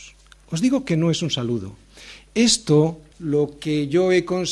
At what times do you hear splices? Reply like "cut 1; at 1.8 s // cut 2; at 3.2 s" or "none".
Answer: cut 1; at 3.1 s